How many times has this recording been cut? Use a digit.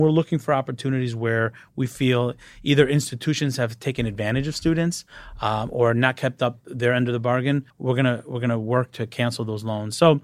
1